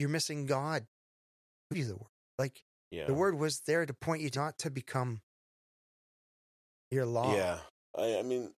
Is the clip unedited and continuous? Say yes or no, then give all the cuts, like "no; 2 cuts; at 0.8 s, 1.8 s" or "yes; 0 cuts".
no; 2 cuts; at 1.7 s, 4.3 s